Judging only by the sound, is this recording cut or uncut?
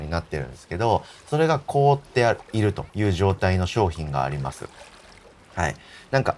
cut